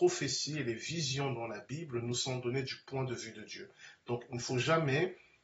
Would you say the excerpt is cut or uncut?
uncut